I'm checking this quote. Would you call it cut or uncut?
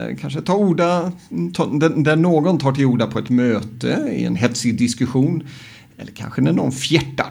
uncut